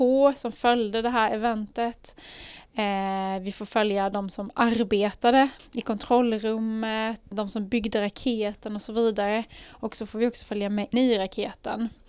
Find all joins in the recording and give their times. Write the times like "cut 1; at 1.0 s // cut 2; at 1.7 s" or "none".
cut 1; at 7.3 s // cut 2; at 10.9 s